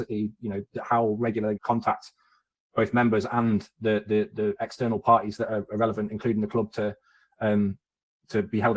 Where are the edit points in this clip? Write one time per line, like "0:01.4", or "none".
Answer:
0:01.6